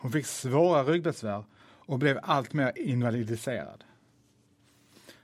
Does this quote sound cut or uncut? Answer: uncut